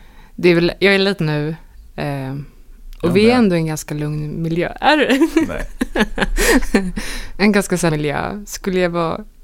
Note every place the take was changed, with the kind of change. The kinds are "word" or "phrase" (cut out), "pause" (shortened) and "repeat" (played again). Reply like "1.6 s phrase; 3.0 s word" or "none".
1.2 s word; 7.9 s word